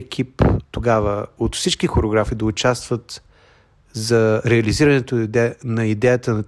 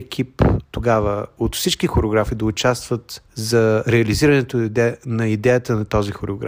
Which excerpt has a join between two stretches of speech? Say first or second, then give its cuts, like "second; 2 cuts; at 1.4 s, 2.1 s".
second; 1 cut; at 3.3 s